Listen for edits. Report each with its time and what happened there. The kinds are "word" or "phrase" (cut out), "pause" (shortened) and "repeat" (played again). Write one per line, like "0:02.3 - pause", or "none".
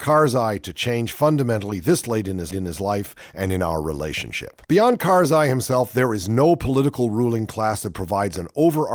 0:02.5 - repeat
0:04.6 - pause